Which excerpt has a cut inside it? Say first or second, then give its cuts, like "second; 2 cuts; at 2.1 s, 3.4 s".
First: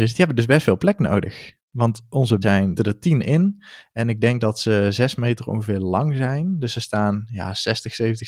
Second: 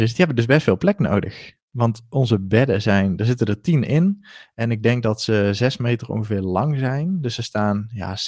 first; 2 cuts; at 2.4 s, 2.8 s